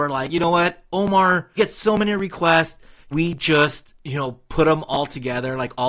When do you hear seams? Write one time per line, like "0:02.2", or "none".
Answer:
0:01.6
0:03.1
0:04.0